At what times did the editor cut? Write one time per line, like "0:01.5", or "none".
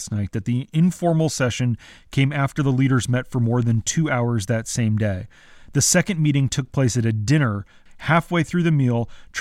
none